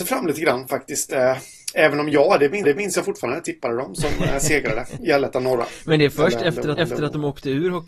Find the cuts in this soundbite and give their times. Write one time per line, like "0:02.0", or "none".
0:02.6
0:06.8